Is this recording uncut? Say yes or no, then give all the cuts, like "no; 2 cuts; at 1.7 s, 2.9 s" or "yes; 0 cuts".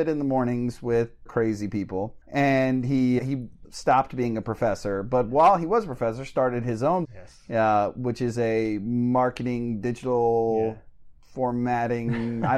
no; 5 cuts; at 1.3 s, 2.2 s, 3.2 s, 3.6 s, 7.0 s